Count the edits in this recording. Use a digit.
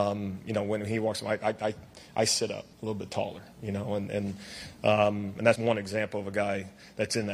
2